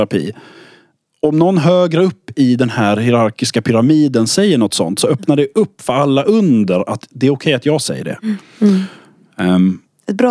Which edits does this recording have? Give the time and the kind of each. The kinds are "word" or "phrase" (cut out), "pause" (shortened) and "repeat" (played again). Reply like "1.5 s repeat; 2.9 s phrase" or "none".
none